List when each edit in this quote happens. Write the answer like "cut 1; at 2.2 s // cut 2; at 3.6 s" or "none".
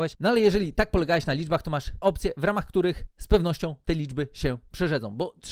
cut 1; at 2.0 s